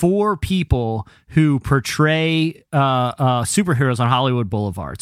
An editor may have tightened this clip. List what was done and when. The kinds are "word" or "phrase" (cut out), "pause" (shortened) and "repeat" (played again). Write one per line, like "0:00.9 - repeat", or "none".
none